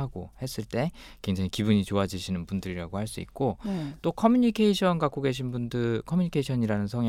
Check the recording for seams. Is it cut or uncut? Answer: uncut